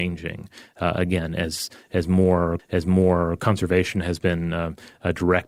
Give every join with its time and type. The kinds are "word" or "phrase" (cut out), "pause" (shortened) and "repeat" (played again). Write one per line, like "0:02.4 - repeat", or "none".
0:02.6 - repeat